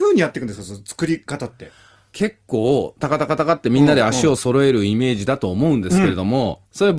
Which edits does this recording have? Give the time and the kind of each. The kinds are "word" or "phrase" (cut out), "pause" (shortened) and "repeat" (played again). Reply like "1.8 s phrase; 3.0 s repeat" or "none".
none